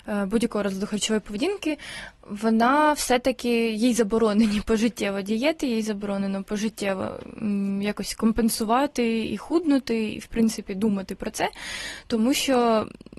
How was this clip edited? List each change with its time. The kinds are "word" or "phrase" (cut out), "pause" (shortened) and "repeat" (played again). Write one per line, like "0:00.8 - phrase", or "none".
0:02.1 - pause

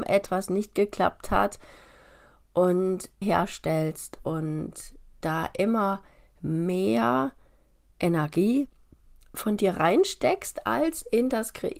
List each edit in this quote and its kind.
0:03.2 - word

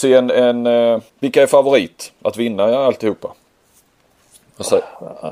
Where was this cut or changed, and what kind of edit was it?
0:01.1 - pause

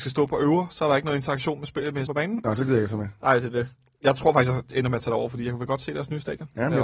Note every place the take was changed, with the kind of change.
0:02.1 - word

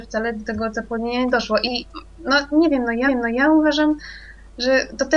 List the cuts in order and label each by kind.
0:03.1 - repeat

